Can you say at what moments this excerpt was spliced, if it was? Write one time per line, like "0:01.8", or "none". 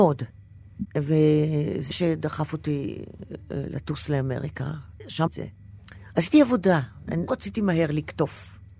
0:01.9
0:05.3
0:07.3